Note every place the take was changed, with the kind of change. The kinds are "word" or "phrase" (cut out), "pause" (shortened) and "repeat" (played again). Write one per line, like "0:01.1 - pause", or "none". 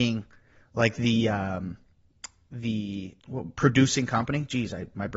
0:03.2 - pause